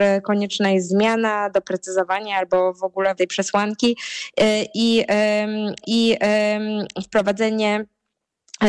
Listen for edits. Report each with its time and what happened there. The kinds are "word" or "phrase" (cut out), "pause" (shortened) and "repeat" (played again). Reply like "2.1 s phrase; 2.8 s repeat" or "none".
3.2 s word; 5.8 s repeat